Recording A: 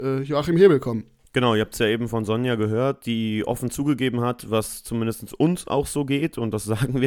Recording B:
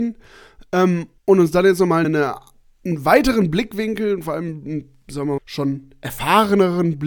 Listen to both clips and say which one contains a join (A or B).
B